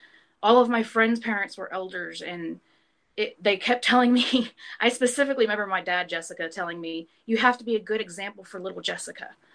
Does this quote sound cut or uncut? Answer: uncut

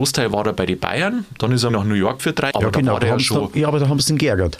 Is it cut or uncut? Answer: cut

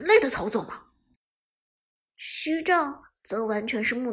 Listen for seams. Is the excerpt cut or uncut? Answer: uncut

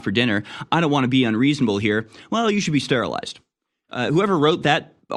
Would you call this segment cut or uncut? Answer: uncut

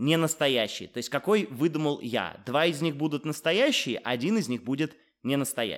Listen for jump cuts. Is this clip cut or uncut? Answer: uncut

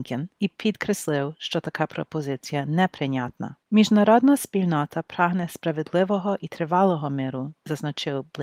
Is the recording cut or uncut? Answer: cut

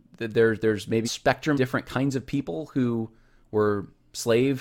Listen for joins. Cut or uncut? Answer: cut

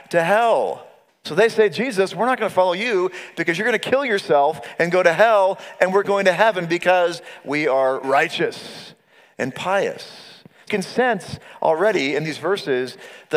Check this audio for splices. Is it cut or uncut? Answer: cut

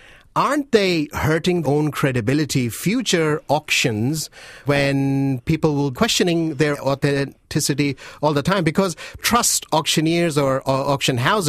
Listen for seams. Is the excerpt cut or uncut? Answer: cut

